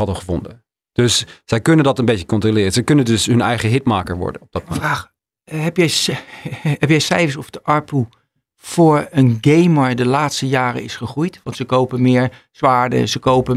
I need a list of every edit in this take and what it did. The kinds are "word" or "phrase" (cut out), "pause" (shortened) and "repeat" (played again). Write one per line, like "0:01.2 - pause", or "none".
none

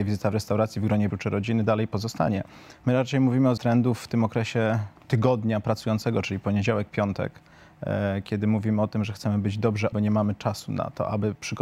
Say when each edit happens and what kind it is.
0:01.1 - word
0:03.6 - word
0:05.0 - pause
0:09.9 - word

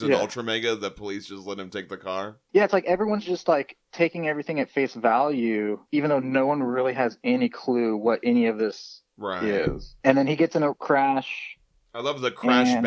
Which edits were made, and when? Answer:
0:05.8 - pause

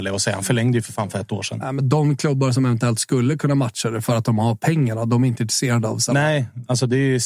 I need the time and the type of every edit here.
none

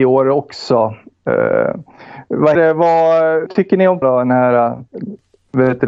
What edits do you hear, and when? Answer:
0:02.5 - word
0:03.5 - word
0:04.0 - word

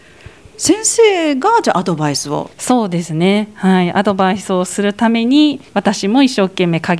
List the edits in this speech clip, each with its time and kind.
0:02.5 - pause
0:05.7 - pause

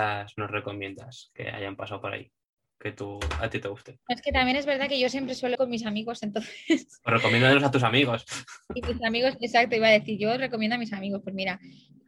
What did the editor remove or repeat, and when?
0:05.5 - word

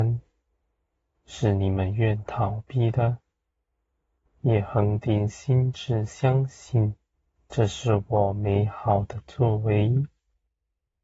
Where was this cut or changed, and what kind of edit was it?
0:07.1 - pause

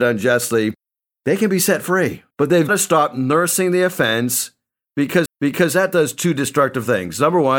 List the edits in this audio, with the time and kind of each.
0:02.3 - pause
0:02.7 - word
0:05.3 - repeat

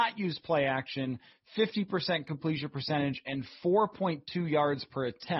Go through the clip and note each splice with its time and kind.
none

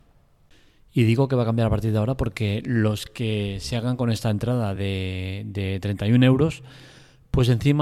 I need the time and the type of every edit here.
none

